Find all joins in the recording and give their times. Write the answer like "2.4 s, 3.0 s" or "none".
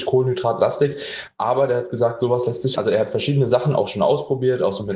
2.8 s